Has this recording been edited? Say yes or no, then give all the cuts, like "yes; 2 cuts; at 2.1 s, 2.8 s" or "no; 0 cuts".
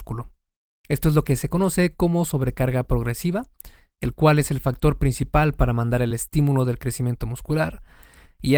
no; 0 cuts